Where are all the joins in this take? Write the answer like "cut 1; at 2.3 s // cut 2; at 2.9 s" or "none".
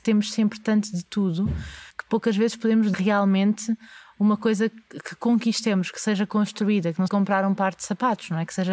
cut 1; at 1.9 s // cut 2; at 2.9 s // cut 3; at 7.1 s